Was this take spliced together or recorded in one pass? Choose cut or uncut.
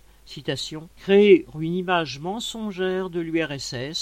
cut